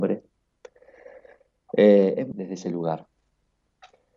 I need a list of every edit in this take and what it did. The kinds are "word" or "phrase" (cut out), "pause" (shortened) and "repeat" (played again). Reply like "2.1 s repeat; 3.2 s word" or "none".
2.3 s word